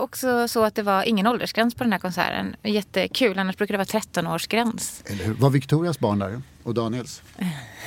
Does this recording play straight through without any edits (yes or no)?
yes